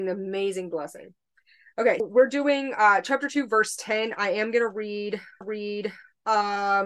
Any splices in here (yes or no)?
yes